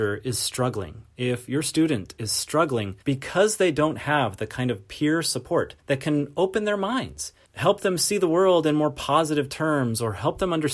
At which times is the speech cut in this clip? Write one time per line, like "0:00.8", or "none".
0:03.0
0:05.8